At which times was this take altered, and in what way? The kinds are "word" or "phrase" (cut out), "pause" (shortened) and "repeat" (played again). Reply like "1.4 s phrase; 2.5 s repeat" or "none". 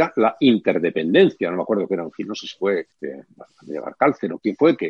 2.9 s pause